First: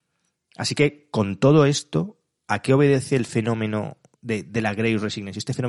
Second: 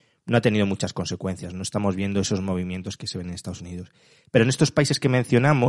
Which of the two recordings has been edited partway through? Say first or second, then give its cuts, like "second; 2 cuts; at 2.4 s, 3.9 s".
first; 1 cut; at 4.1 s